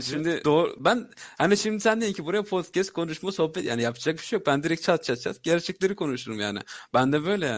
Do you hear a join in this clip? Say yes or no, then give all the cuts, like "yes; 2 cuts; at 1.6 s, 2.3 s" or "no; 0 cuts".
no; 0 cuts